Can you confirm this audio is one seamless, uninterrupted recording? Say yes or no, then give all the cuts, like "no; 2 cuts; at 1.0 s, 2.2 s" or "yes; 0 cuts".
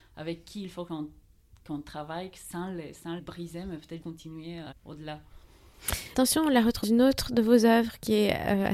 no; 5 cuts; at 3.2 s, 4.0 s, 4.7 s, 6.1 s, 6.8 s